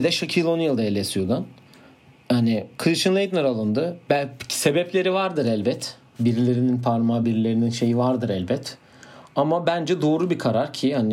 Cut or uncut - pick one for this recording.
uncut